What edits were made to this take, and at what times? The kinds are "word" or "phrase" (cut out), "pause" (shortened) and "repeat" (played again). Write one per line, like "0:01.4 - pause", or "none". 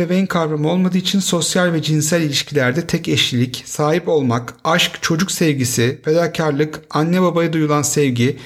none